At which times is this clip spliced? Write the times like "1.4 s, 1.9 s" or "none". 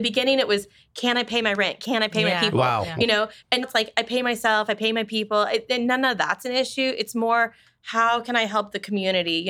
3.6 s